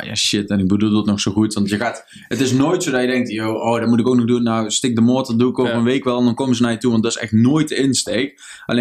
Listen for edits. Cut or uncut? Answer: uncut